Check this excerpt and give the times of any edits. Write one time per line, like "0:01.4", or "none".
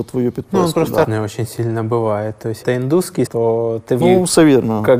0:01.0
0:02.6
0:03.3
0:04.0